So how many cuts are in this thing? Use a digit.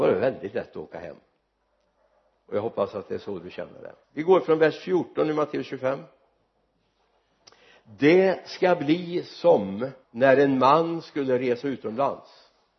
3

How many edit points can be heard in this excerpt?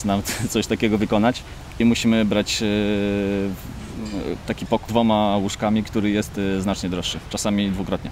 2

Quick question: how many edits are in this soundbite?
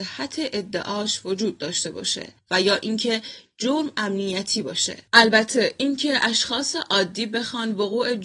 2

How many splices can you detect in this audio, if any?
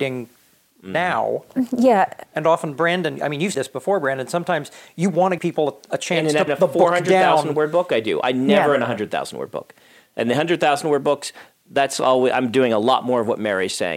3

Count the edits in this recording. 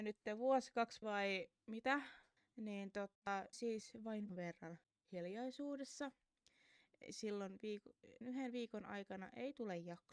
6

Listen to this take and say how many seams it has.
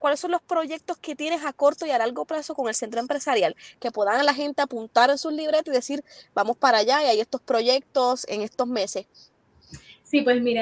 0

